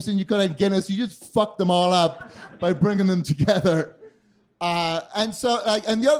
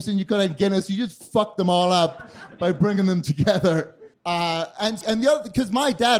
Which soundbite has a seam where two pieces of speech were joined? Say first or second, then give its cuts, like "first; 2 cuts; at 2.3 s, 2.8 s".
second; 2 cuts; at 4.1 s, 5.0 s